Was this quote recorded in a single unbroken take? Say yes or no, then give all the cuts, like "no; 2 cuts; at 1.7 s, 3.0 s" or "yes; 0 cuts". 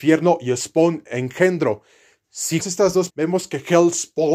no; 2 cuts; at 2.6 s, 3.1 s